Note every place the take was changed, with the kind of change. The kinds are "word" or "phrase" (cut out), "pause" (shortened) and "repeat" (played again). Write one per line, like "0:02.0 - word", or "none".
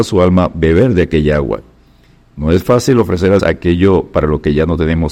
0:03.4 - word